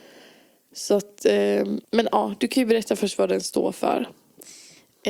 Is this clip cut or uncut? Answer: cut